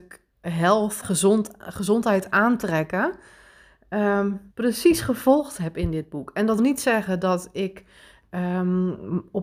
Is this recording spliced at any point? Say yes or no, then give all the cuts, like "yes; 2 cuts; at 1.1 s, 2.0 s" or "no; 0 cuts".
yes; 3 cuts; at 1.0 s, 4.5 s, 6.6 s